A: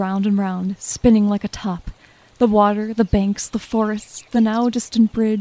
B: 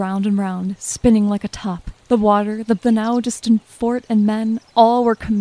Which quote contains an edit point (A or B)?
B